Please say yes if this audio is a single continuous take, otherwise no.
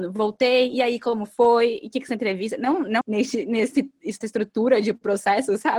no